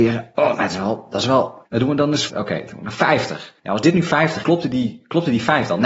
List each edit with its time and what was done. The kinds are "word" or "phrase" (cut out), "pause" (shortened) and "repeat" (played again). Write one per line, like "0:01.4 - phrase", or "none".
0:01.7 - pause
0:02.3 - word
0:03.6 - pause
0:04.4 - word